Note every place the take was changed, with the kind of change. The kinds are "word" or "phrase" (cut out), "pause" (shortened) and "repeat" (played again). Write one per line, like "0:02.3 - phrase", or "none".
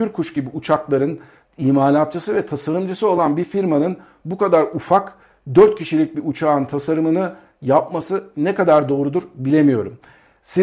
none